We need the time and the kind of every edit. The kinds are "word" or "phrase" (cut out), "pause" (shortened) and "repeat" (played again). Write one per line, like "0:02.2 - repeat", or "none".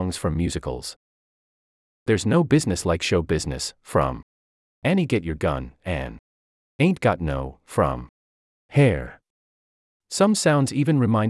none